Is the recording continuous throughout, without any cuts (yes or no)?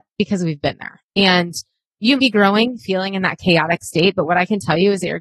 no